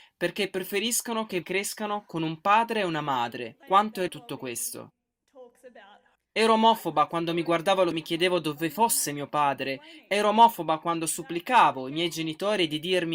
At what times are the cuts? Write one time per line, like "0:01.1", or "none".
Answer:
0:01.4
0:03.6
0:04.1
0:06.2
0:07.9